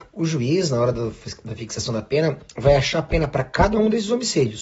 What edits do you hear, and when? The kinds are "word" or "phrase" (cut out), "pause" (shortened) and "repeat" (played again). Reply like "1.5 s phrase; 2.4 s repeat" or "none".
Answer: none